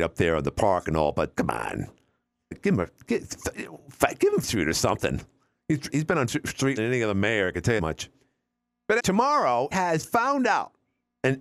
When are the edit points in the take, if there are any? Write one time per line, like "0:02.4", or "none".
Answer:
0:01.3
0:02.5
0:04.4
0:05.9
0:06.3
0:06.8
0:07.8
0:09.0
0:09.7